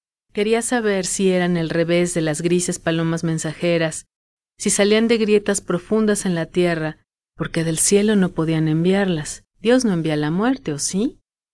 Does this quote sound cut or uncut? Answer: cut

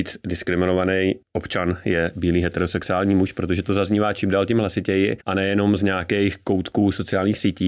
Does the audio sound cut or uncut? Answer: cut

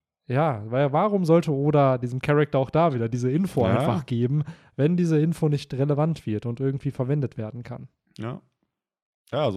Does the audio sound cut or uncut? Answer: uncut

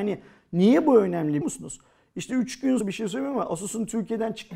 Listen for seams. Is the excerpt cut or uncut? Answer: cut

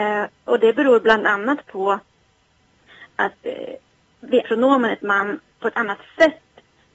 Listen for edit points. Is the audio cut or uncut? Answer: cut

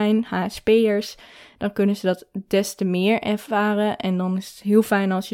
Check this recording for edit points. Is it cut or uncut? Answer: uncut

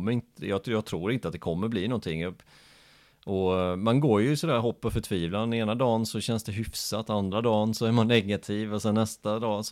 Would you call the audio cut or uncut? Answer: uncut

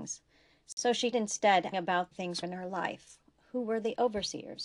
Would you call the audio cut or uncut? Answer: cut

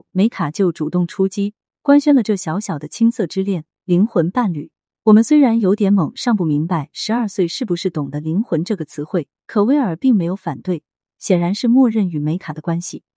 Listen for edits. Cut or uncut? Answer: cut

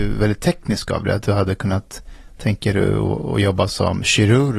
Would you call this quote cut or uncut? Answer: uncut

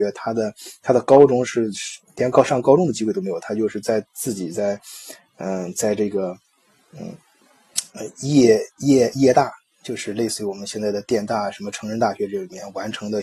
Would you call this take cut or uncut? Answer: uncut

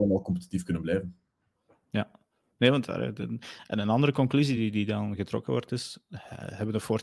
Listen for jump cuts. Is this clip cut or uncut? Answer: uncut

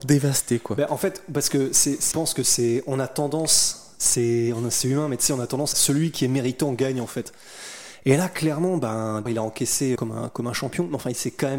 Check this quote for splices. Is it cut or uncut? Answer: cut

